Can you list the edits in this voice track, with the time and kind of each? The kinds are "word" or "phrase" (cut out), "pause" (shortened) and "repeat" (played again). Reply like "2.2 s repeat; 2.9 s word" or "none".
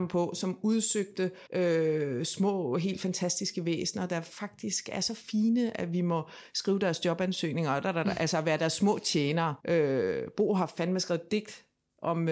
1.5 s pause; 9.6 s pause

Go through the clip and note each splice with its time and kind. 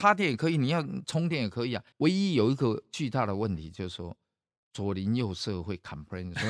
1.9 s pause

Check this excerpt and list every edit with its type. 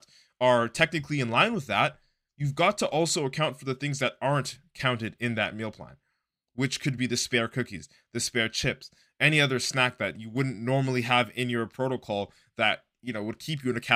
none

